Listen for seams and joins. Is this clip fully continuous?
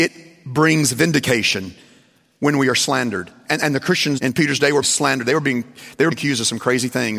no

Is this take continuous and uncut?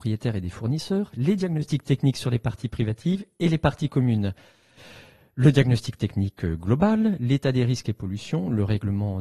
yes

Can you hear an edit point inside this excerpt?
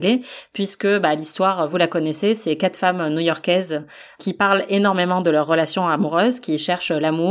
no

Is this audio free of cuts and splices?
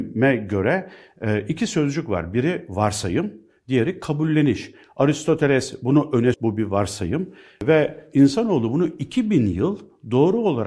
no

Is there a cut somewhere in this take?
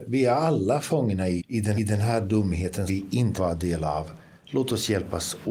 yes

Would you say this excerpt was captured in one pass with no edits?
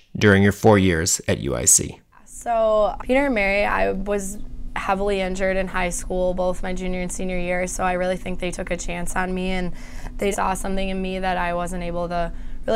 no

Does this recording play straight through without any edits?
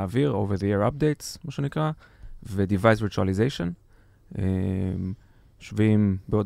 yes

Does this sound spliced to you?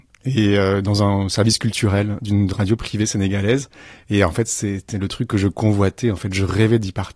no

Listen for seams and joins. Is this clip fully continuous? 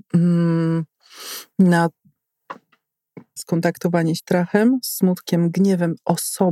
no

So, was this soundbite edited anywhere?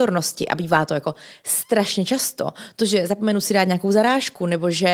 no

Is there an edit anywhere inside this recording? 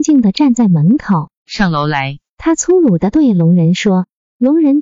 yes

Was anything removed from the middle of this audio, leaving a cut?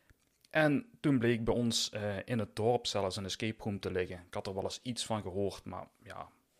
no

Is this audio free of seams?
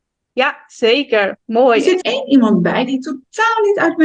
no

